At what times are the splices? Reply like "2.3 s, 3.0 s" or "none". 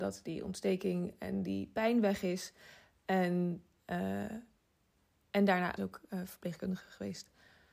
5.8 s